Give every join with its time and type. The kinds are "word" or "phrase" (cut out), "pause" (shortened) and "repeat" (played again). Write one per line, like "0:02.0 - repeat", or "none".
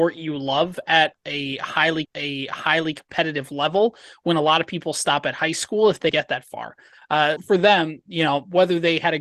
0:02.0 - repeat
0:06.1 - word
0:07.4 - word